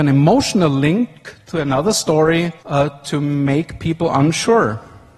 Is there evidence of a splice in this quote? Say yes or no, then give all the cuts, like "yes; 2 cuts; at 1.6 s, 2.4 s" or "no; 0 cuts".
yes; 1 cut; at 2.6 s